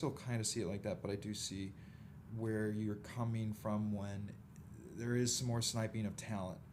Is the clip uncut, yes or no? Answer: no